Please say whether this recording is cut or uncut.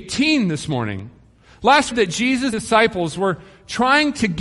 cut